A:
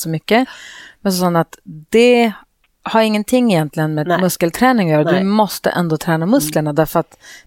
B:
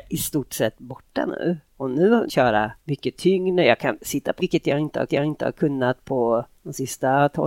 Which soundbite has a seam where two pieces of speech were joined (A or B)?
B